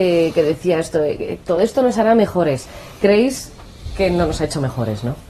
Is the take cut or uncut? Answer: uncut